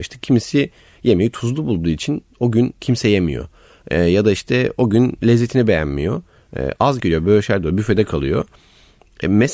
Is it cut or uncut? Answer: cut